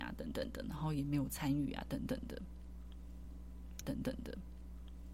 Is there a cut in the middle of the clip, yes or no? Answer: yes